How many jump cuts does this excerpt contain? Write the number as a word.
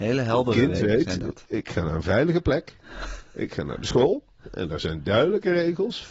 zero